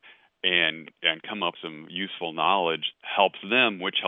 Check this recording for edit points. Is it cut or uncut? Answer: cut